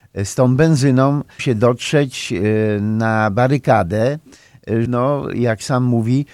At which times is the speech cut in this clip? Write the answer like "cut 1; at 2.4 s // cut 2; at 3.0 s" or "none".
cut 1; at 1.4 s // cut 2; at 4.8 s